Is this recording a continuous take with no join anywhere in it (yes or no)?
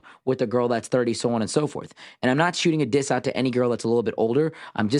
yes